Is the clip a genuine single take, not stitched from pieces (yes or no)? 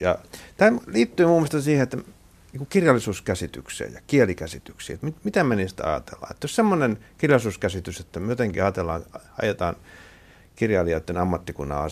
yes